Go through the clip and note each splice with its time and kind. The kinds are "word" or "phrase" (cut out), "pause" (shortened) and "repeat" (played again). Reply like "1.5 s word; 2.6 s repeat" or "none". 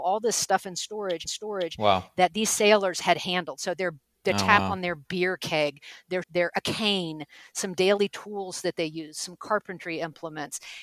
1.2 s repeat; 6.2 s word